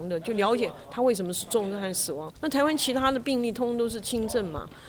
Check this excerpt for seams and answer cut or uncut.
cut